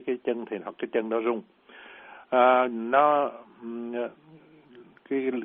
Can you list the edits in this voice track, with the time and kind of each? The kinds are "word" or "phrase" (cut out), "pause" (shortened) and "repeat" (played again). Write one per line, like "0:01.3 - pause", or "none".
none